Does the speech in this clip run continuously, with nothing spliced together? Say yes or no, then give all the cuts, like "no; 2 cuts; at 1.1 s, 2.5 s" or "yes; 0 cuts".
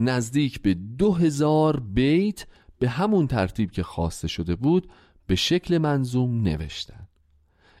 yes; 0 cuts